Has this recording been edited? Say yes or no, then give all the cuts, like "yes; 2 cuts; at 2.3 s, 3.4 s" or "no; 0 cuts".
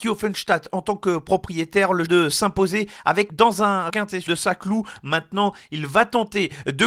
yes; 4 cuts; at 2.1 s, 3.3 s, 3.9 s, 4.3 s